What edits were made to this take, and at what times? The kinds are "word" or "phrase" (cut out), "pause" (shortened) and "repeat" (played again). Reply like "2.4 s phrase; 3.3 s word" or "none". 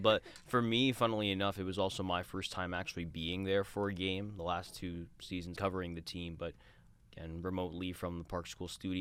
5.5 s phrase